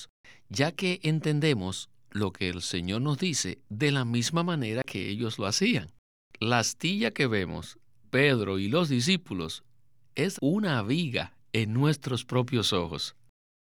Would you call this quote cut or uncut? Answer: cut